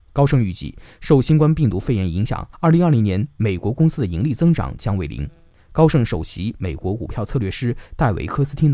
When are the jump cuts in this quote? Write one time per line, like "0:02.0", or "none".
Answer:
0:02.5